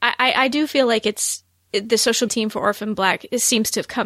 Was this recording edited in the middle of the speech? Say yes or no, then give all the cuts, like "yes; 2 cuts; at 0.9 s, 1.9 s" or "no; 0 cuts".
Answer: yes; 1 cut; at 2.3 s